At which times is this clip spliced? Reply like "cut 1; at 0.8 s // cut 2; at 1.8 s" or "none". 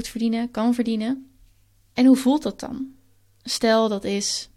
none